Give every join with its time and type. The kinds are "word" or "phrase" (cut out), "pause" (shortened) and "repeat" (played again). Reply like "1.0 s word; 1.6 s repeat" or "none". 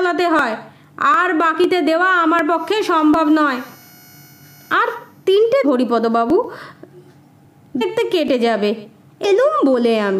5.6 s word; 7.8 s word; 9.2 s word